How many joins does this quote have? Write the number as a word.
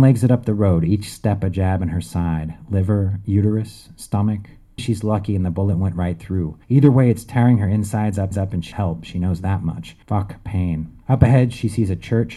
six